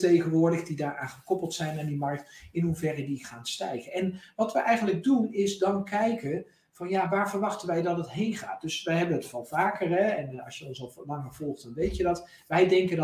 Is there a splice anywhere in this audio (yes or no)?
yes